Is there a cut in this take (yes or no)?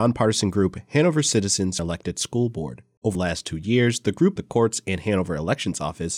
yes